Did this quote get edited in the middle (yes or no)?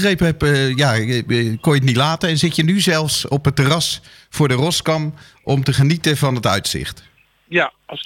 no